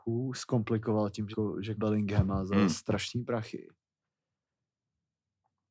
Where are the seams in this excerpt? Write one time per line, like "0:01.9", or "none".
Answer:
0:01.3
0:01.8